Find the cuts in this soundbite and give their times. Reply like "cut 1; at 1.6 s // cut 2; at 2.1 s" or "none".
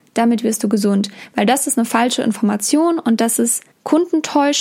cut 1; at 3.7 s